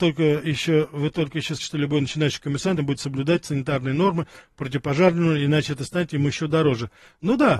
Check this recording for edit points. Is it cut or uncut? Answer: cut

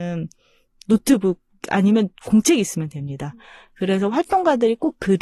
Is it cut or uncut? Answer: uncut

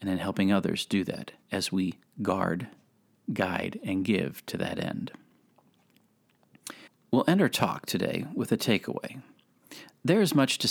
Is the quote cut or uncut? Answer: cut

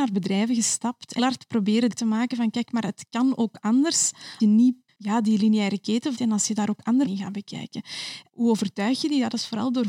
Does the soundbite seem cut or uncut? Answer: cut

